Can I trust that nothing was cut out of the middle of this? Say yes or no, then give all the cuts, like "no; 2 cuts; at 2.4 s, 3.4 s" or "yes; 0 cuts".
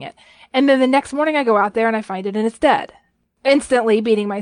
yes; 0 cuts